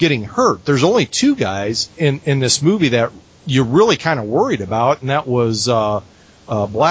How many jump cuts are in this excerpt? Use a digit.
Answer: 1